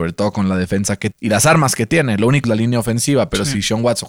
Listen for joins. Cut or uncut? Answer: cut